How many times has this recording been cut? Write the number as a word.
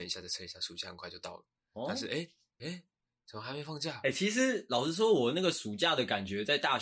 one